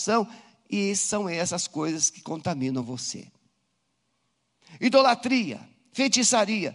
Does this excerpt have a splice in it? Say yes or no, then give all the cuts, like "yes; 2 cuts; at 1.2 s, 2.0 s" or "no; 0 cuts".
no; 0 cuts